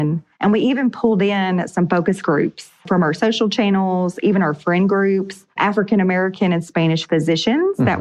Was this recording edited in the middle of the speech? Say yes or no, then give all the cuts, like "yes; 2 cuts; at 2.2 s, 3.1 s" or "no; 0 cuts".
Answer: no; 0 cuts